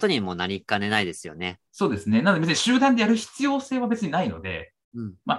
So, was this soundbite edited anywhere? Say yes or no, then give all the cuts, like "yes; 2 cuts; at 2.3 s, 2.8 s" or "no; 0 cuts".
yes; 1 cut; at 1.7 s